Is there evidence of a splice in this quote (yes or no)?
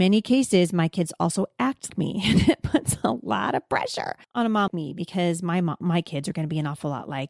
yes